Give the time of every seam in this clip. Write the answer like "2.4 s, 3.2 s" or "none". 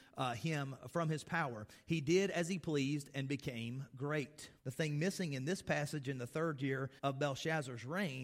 4.6 s, 7.0 s